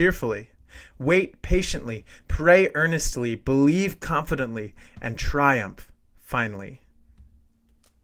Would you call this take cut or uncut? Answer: uncut